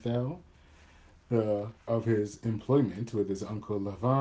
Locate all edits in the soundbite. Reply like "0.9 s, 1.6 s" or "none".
1.9 s